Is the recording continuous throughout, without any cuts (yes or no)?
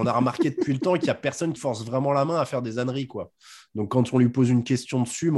no